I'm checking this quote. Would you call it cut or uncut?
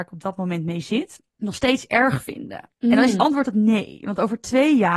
cut